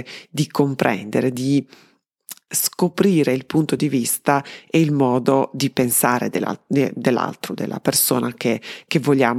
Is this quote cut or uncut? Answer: uncut